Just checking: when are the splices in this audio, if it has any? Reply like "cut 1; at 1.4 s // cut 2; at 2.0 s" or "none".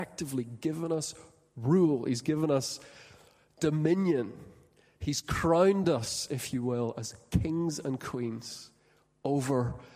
none